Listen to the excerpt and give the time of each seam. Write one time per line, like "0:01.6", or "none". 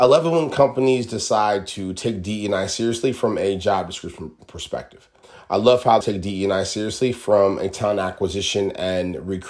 0:05.2
0:06.0